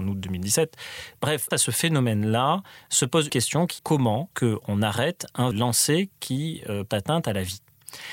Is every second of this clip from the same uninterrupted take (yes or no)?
no